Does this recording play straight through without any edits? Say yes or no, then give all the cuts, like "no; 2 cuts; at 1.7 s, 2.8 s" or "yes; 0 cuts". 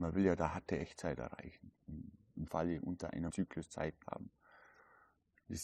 no; 3 cuts; at 2.5 s, 3.3 s, 4.0 s